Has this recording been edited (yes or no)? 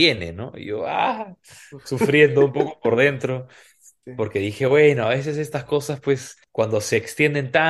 no